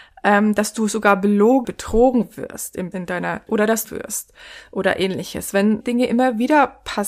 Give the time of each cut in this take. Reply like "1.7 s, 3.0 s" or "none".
1.6 s, 2.9 s, 3.5 s, 3.8 s, 5.8 s